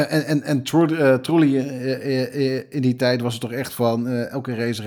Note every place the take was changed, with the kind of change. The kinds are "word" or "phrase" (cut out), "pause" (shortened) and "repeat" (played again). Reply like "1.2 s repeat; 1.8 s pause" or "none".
none